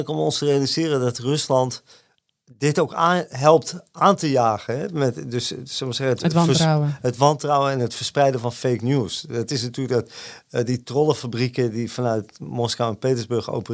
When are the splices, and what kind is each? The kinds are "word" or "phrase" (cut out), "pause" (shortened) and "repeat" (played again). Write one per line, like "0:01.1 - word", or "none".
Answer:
none